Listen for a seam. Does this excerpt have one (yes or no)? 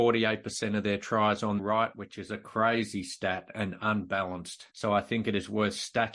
yes